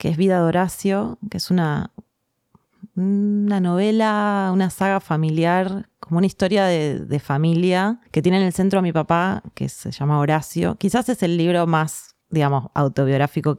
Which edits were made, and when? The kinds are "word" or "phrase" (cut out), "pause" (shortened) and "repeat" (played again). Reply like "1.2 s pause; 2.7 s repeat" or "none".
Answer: 8.1 s pause; 12.2 s pause